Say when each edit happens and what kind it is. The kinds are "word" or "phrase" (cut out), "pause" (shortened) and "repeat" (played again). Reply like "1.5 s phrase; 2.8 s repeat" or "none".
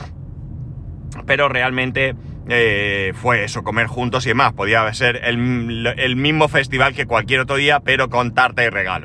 none